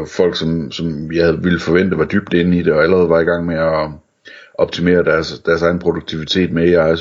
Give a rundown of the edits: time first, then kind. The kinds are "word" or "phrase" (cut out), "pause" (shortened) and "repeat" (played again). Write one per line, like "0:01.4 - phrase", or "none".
none